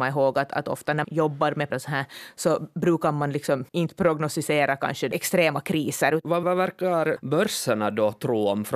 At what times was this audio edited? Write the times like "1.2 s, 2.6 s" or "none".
1.0 s, 1.7 s, 3.7 s, 6.4 s, 7.2 s